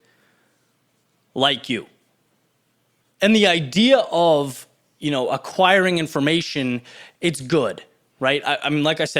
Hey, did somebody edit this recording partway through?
no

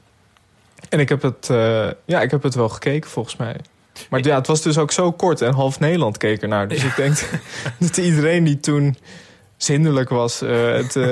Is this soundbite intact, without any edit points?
yes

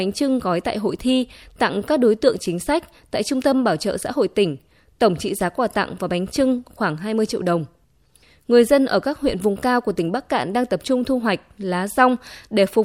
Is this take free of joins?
yes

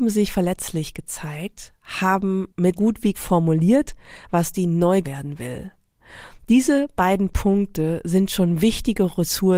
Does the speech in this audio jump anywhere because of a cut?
yes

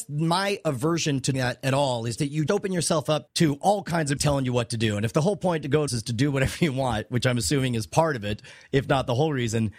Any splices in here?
yes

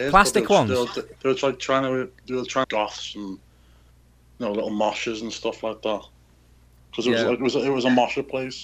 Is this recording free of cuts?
no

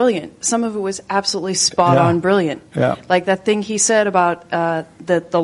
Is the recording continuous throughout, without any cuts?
yes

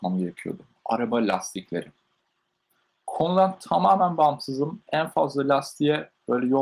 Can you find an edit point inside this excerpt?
no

